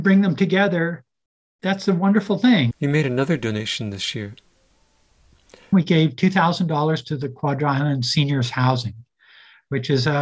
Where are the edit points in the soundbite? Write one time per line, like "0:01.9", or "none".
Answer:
none